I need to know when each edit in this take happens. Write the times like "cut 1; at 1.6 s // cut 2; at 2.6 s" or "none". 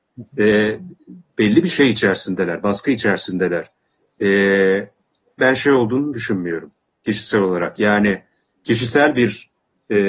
cut 1; at 5.4 s